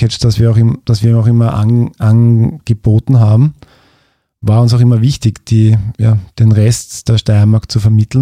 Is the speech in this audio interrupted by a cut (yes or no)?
no